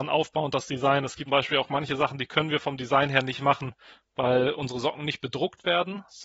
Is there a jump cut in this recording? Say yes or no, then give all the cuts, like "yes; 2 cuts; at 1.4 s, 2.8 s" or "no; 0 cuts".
yes; 1 cut; at 1.3 s